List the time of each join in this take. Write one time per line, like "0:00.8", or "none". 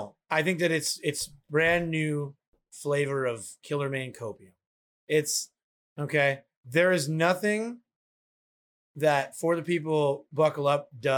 none